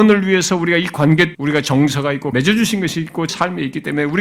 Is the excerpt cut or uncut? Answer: cut